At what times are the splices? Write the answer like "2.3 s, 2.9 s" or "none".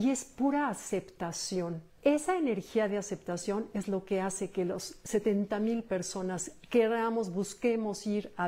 1.9 s